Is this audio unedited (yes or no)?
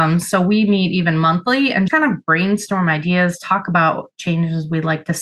no